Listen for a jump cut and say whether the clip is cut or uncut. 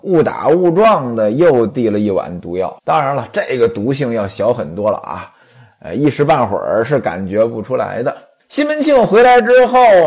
cut